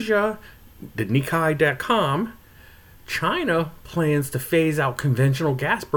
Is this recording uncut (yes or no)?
yes